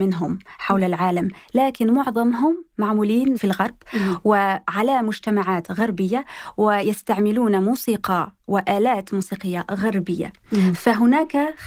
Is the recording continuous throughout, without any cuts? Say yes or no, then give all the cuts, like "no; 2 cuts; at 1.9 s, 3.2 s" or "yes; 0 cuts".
yes; 0 cuts